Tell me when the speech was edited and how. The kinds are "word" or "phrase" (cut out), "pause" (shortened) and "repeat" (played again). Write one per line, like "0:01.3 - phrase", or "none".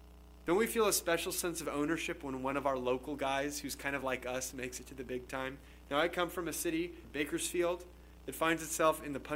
none

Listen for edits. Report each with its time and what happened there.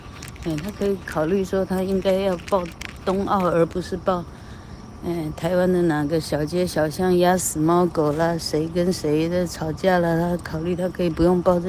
none

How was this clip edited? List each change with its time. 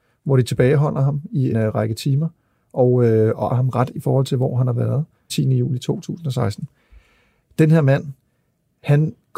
0:01.5 - word
0:03.5 - word
0:03.9 - word
0:05.3 - word

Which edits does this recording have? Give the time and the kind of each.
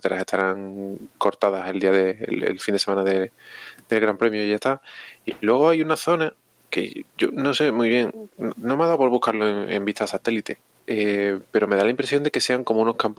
none

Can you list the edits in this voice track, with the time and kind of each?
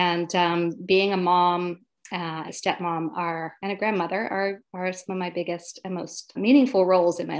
0:02.5 - phrase
0:06.4 - word

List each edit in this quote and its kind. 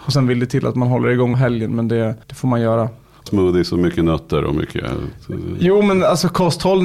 0:01.3 - phrase
0:02.2 - pause
0:03.3 - phrase

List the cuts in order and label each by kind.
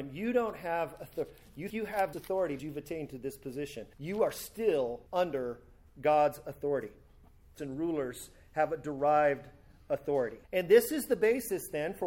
0:01.7 - word
0:02.1 - word
0:02.6 - word
0:03.9 - pause
0:05.1 - pause
0:07.6 - word
0:10.4 - pause

